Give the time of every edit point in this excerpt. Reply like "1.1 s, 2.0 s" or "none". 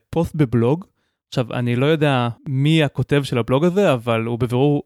2.4 s